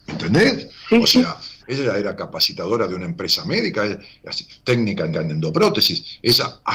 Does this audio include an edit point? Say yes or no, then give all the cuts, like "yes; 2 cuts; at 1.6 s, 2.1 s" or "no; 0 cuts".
yes; 2 cuts; at 1.6 s, 5.1 s